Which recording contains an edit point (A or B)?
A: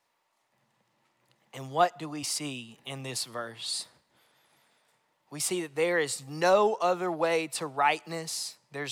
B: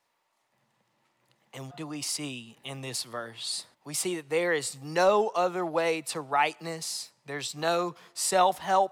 B